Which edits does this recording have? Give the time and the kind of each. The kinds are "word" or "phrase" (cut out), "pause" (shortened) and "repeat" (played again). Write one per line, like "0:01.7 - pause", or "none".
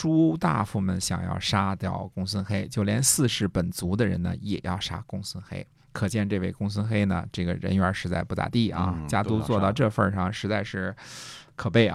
none